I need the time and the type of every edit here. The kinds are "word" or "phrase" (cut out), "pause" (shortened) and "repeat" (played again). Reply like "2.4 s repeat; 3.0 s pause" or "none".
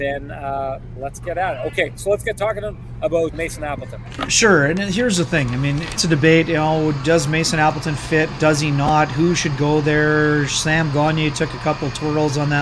1.0 s word; 3.3 s word; 6.0 s phrase